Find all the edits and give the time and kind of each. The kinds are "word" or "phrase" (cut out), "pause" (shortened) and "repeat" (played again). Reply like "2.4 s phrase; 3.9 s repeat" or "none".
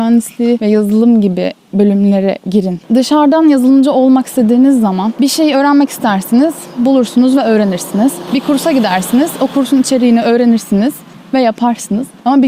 none